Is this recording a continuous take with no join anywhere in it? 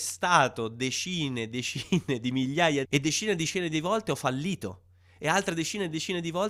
no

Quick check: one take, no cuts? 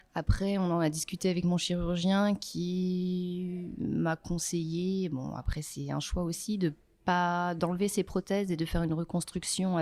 yes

